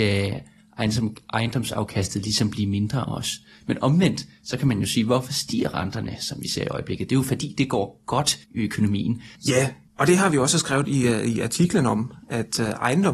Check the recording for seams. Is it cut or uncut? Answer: cut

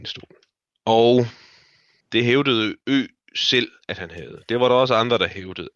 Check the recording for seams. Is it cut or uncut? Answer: uncut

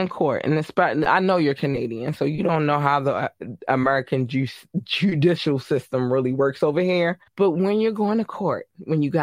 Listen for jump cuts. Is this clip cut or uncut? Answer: cut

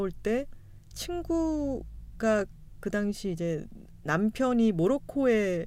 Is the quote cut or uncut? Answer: uncut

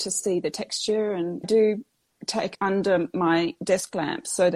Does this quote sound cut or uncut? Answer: cut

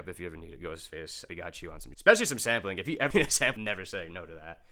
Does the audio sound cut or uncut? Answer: cut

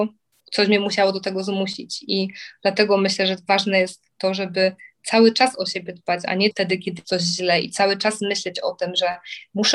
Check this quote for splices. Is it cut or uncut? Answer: cut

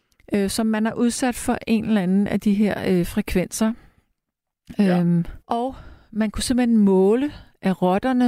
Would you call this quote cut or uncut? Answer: cut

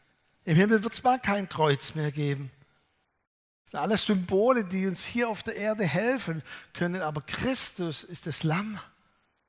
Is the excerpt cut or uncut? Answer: uncut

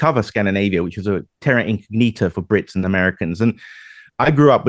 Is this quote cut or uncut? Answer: cut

